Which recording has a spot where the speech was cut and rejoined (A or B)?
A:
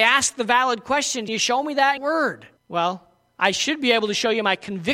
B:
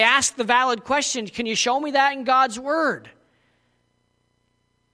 A